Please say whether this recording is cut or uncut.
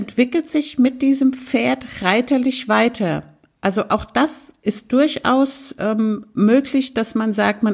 uncut